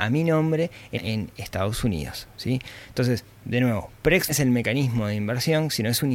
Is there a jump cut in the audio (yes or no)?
yes